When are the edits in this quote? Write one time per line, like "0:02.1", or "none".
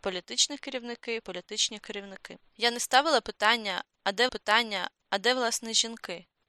0:01.2
0:04.3